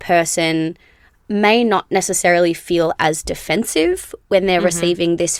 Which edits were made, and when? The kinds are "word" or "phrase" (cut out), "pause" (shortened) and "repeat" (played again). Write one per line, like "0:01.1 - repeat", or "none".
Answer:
none